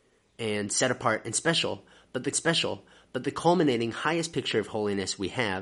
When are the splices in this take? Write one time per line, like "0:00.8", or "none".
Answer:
0:02.3